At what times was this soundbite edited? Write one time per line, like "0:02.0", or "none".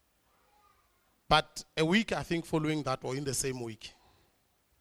none